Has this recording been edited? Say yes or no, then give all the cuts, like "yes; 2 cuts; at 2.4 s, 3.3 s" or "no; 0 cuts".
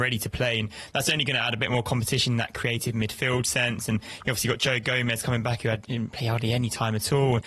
no; 0 cuts